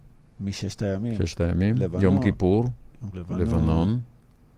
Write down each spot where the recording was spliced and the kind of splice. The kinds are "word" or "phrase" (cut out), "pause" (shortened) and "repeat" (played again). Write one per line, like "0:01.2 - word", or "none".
0:03.1 - word